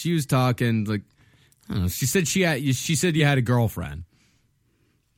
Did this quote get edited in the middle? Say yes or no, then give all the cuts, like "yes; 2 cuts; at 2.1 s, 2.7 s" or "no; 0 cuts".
no; 0 cuts